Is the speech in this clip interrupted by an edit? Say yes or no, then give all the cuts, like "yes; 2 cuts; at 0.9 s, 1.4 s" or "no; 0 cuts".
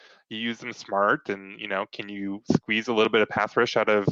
no; 0 cuts